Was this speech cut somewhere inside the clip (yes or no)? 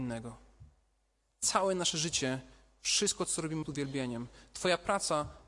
yes